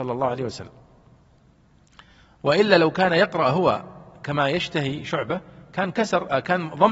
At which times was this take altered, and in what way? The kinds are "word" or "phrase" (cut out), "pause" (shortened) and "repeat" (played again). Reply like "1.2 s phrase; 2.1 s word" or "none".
none